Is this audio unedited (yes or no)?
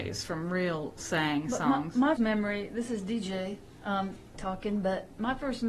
no